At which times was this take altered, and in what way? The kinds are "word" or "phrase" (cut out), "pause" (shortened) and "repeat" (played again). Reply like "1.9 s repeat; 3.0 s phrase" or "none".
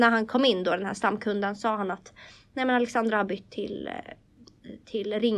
none